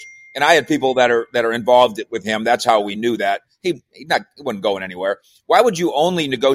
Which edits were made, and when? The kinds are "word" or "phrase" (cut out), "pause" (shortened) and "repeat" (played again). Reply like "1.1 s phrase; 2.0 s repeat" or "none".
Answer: none